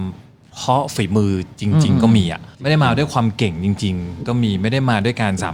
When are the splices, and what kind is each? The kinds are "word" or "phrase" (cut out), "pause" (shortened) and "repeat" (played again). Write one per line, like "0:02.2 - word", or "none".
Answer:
0:02.5 - pause